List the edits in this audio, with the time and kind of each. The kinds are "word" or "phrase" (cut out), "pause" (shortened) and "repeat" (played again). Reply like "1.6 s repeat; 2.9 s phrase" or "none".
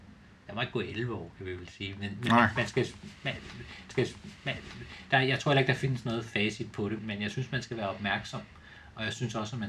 3.9 s repeat; 7.0 s word